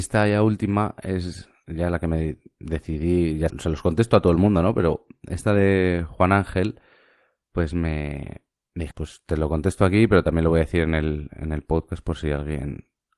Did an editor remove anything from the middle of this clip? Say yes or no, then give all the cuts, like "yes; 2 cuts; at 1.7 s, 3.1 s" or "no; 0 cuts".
yes; 2 cuts; at 3.5 s, 8.9 s